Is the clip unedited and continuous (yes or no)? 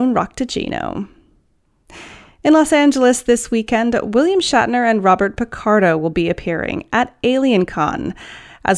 yes